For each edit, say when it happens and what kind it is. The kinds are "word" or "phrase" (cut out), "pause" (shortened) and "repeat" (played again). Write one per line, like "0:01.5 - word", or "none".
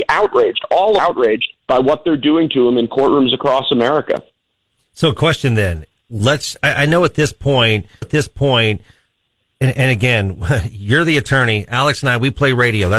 0:01.0 - phrase
0:01.6 - pause
0:08.0 - repeat